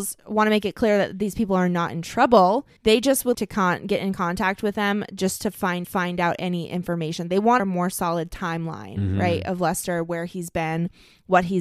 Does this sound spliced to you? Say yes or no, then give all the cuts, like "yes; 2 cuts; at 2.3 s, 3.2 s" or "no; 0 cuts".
yes; 4 cuts; at 2.8 s, 3.3 s, 5.8 s, 7.6 s